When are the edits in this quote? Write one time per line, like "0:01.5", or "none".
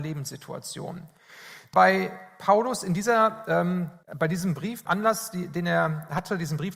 0:01.7
0:04.0
0:04.9